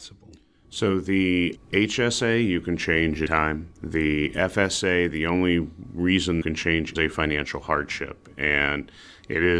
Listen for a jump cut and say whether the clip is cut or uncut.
cut